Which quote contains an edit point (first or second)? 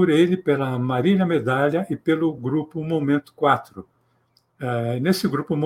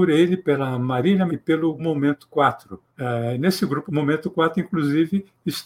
second